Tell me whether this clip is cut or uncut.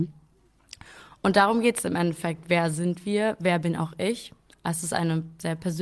uncut